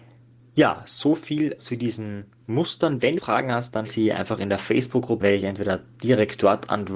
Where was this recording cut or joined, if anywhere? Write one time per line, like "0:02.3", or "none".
0:01.6
0:03.2
0:03.9
0:05.2